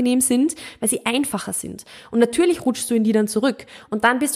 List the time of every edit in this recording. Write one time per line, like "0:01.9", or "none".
none